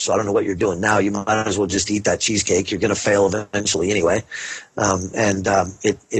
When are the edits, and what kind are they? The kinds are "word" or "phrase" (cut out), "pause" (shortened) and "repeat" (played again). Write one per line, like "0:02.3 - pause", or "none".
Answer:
none

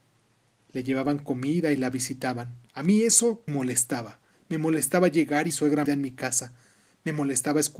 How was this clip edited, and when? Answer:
0:02.7 - pause
0:03.5 - word
0:05.5 - phrase
0:05.8 - word

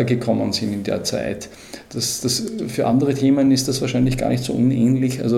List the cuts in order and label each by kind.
none

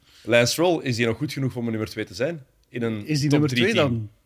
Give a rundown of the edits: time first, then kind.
none

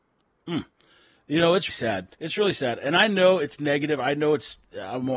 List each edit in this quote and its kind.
0:01.7 - word
0:02.1 - pause

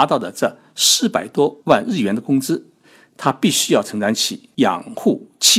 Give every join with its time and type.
none

